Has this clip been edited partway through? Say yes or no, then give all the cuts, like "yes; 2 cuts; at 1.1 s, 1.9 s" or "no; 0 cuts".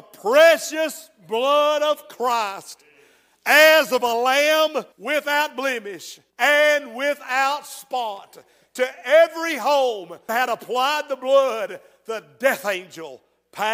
yes; 3 cuts; at 4.9 s, 6.3 s, 10.3 s